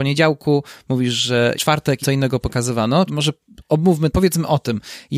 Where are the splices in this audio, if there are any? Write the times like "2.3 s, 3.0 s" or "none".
1.5 s, 2.0 s, 3.1 s, 4.1 s